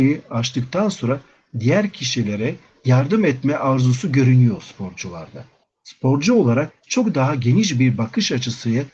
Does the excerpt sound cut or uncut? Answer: uncut